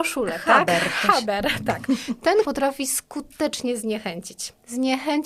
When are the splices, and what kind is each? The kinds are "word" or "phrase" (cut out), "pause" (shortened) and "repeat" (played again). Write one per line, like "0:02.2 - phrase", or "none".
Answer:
0:02.4 - word

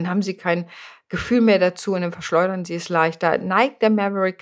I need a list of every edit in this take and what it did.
none

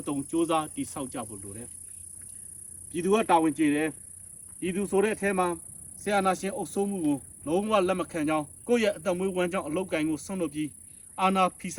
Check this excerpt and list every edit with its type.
0:08.6 - pause

